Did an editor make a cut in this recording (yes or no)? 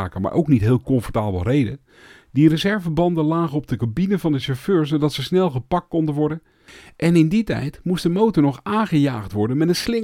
no